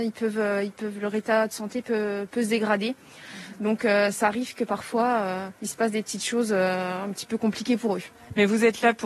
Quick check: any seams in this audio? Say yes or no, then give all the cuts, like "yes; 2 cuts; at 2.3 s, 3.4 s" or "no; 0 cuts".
yes; 1 cut; at 5.5 s